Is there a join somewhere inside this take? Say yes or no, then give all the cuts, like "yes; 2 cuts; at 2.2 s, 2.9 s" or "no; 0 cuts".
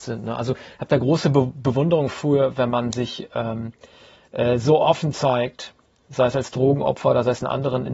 no; 0 cuts